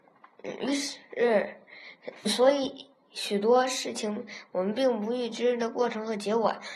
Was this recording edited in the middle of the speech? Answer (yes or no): yes